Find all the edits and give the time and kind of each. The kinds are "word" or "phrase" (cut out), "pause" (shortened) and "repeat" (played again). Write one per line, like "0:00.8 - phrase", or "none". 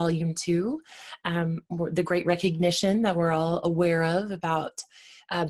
none